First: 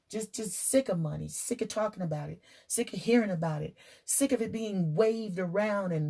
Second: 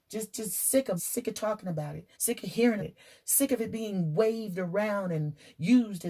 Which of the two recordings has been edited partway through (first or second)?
second